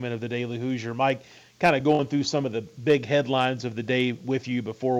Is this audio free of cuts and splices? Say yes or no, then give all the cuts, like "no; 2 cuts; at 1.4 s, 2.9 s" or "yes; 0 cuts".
yes; 0 cuts